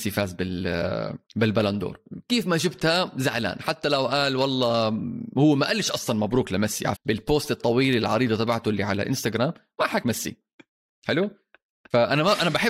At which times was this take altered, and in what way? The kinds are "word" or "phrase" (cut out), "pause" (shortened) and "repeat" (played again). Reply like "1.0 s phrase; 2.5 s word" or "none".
1.3 s pause; 6.9 s word; 10.0 s word